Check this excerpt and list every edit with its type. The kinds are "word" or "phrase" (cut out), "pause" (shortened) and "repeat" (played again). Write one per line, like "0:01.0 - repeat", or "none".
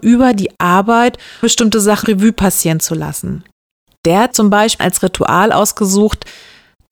0:01.4 - word
0:02.0 - word
0:04.3 - word
0:04.8 - word